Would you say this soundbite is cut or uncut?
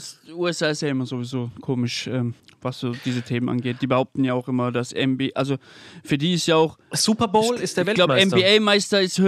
cut